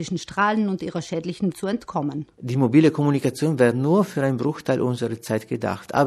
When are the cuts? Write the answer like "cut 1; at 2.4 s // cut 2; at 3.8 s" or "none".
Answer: cut 1; at 1.5 s